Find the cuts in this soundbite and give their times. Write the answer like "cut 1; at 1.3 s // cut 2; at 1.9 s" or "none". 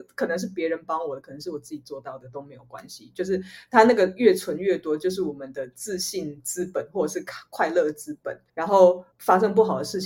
cut 1; at 8.5 s // cut 2; at 9.1 s